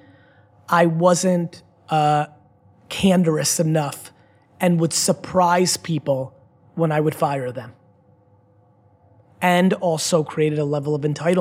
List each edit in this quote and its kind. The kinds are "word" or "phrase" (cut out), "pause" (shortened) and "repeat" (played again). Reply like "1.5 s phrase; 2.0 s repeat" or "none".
none